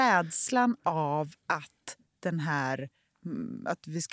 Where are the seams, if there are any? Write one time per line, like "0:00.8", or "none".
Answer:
none

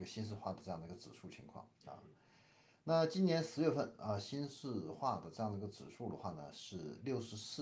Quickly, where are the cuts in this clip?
0:01.8

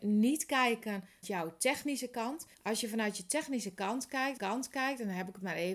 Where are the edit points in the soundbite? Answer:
0:01.2
0:02.5
0:04.4

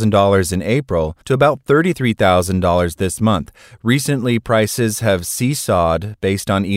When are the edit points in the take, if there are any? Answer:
0:01.2

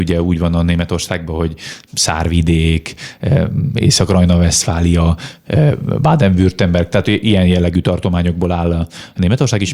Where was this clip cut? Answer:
none

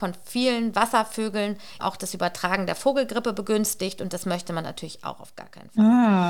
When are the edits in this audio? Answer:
0:01.8

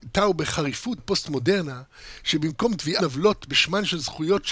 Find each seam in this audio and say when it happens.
0:01.0
0:03.0

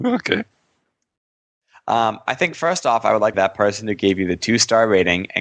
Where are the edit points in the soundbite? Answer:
0:03.3

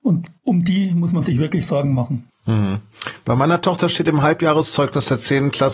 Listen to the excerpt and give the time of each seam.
0:02.3

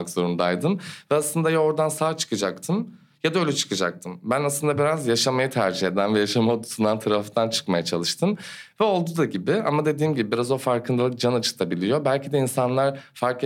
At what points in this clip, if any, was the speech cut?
none

